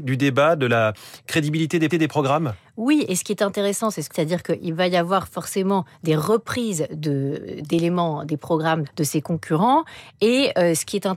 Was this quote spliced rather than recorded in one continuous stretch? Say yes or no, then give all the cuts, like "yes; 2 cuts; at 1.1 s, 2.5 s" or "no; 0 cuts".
yes; 3 cuts; at 1.9 s, 4.1 s, 8.8 s